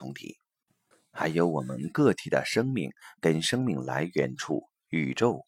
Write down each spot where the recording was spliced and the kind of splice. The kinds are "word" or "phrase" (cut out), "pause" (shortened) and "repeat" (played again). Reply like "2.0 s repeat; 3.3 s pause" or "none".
0.9 s pause